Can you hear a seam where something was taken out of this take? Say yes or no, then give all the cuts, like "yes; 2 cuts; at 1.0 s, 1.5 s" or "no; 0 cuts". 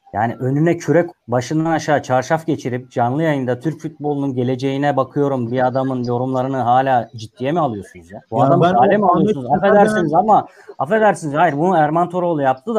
yes; 3 cuts; at 1.1 s, 5.5 s, 8.2 s